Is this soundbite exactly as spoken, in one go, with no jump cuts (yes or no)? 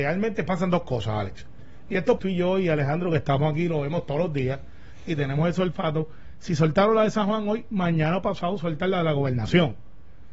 no